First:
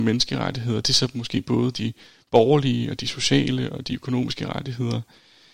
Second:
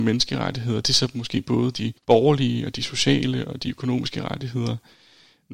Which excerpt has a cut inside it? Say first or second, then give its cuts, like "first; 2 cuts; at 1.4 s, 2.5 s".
second; 1 cut; at 2.0 s